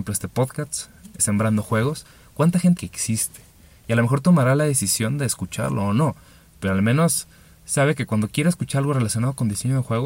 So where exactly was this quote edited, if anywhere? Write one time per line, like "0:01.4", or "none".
0:01.2
0:02.8